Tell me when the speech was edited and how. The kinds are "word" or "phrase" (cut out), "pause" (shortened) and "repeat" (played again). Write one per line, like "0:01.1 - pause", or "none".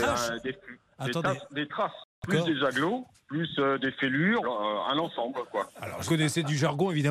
0:02.1 - pause
0:03.1 - pause
0:04.4 - word
0:06.1 - word